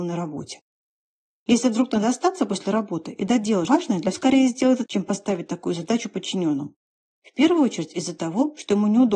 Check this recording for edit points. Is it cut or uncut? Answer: cut